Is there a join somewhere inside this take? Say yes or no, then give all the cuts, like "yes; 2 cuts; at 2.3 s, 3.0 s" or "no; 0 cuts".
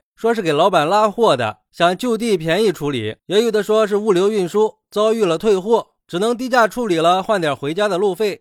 yes; 1 cut; at 3.2 s